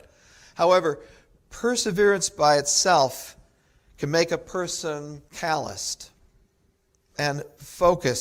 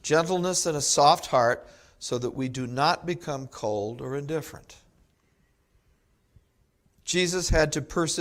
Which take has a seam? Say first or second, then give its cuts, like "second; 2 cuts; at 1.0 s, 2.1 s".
first; 1 cut; at 5.3 s